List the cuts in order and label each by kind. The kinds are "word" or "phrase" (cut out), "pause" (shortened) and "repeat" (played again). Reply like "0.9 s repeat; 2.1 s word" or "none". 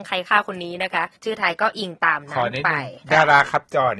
1.2 s pause; 3.0 s pause